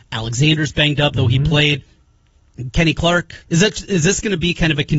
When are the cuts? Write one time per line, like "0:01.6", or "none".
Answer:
0:03.4